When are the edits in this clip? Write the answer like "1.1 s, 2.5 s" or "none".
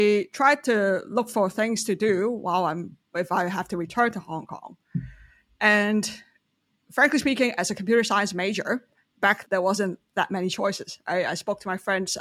9.4 s

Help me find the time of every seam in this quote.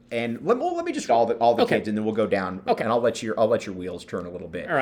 1.1 s, 2.8 s

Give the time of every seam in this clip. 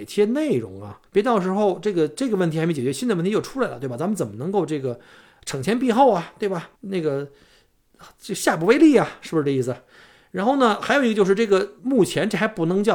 1.1 s, 6.7 s, 11.8 s

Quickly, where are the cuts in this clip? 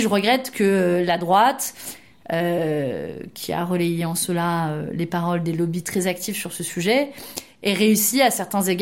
none

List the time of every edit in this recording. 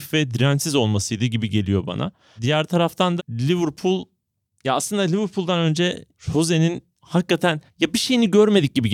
3.2 s, 6.1 s

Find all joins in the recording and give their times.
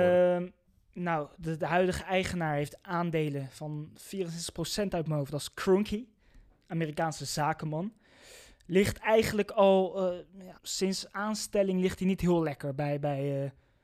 10.6 s

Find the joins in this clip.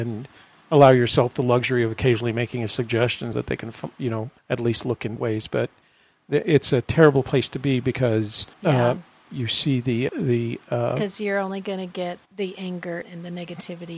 3.3 s, 4.4 s, 5.2 s, 8.5 s, 9.3 s, 10.1 s, 12.3 s, 13.0 s

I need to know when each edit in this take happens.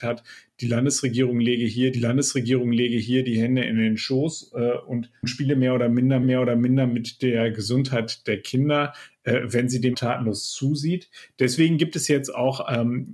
1.9 s, 6.2 s, 9.9 s

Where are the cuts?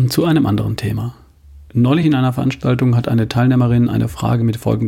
none

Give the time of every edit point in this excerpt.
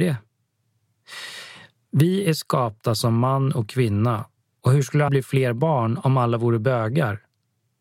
4.4 s, 5.1 s

